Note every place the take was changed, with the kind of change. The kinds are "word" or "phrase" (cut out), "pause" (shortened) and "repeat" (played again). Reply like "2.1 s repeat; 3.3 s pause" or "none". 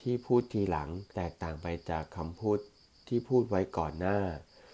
1.1 s pause